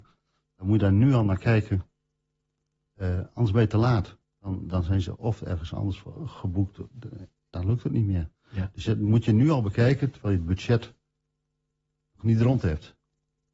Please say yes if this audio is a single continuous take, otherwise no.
no